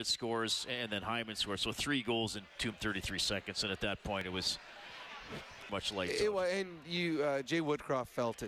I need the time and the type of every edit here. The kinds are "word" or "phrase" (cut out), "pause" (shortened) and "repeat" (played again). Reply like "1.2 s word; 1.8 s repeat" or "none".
2.7 s word; 5.7 s word